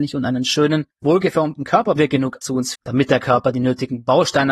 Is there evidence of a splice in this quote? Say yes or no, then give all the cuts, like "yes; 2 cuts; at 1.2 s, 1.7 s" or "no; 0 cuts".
yes; 4 cuts; at 0.9 s, 2.0 s, 2.4 s, 2.8 s